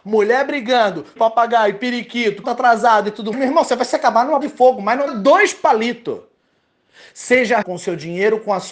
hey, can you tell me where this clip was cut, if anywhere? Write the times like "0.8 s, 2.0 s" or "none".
1.2 s, 2.4 s, 3.3 s, 4.4 s, 5.1 s, 7.6 s